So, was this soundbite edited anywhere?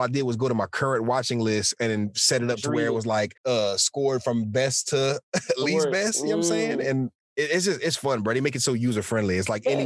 yes; 2 cuts; at 3.4 s, 7.2 s

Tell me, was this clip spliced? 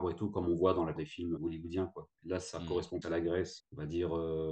yes; 4 cuts; at 1.0 s, 1.4 s, 3.0 s, 3.6 s

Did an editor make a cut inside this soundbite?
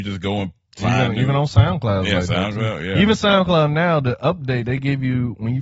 no; 0 cuts

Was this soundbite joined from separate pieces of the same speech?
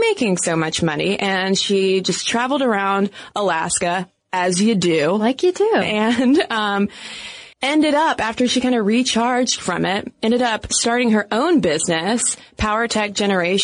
yes; 1 cut; at 7.5 s

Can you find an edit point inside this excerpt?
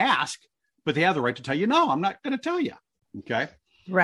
no; 0 cuts

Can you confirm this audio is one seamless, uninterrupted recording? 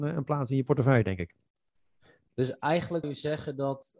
no; 1 cut; at 3.0 s

